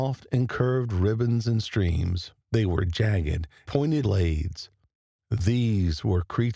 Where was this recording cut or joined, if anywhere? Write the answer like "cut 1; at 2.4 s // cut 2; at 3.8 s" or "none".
cut 1; at 2.4 s // cut 2; at 3.7 s // cut 3; at 4.0 s